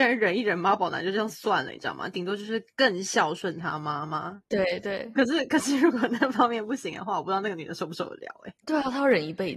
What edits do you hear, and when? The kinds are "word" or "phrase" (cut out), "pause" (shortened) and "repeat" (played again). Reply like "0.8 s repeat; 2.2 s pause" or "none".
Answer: 8.6 s pause